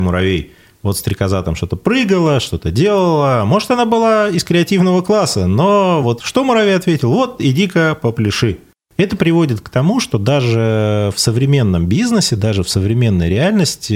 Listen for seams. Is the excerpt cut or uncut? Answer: uncut